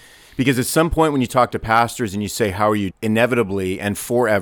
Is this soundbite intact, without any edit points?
no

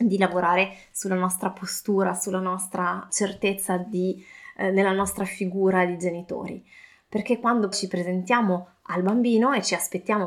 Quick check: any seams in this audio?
yes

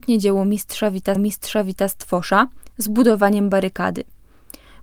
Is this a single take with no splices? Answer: no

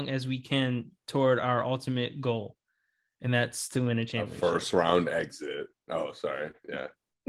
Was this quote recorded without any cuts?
yes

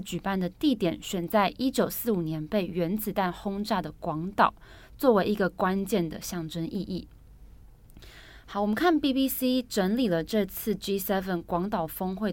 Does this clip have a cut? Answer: no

